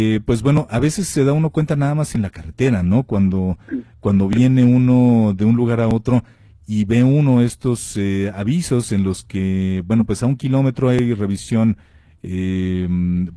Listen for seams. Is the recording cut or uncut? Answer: uncut